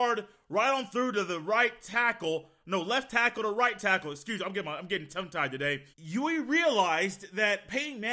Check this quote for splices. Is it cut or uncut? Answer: cut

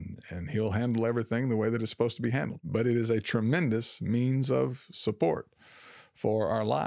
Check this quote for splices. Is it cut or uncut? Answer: uncut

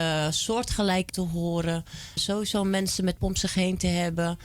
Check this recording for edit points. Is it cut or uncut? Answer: cut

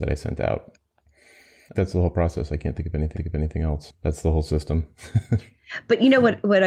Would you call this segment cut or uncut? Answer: cut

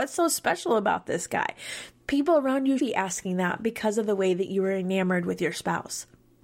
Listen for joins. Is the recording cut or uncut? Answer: cut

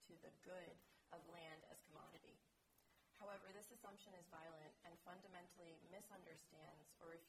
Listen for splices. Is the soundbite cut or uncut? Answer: uncut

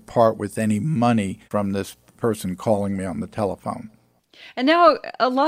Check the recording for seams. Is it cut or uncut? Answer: cut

